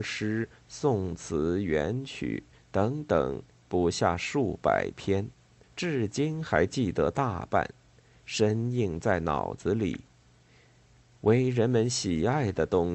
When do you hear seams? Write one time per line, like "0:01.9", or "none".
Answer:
0:05.6